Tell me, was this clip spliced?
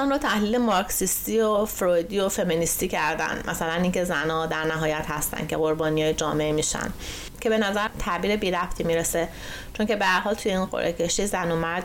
no; 0 cuts

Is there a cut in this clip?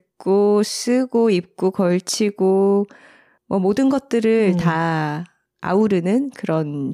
no; 0 cuts

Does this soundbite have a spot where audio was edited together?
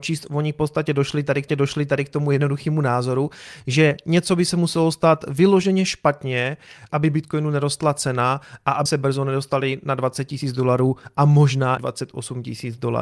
yes; 4 cuts; at 1.5 s, 6.9 s, 8.9 s, 11.8 s

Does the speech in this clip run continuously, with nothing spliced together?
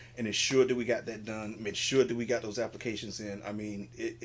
yes; 0 cuts

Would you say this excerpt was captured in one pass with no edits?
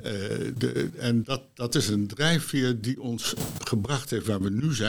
yes; 0 cuts

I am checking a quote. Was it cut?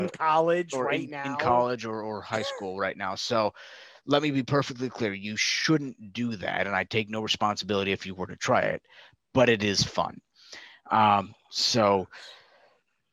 no; 0 cuts

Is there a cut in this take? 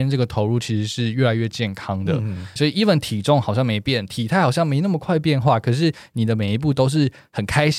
yes; 1 cut; at 2.6 s

